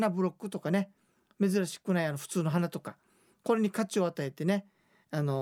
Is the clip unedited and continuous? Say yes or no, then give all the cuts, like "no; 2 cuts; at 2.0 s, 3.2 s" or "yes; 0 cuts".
yes; 0 cuts